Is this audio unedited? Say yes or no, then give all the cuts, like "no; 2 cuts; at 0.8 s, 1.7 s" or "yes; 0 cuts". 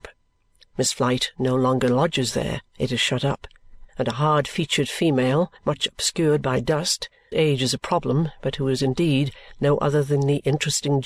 no; 4 cuts; at 2.7 s, 3.9 s, 5.6 s, 7.3 s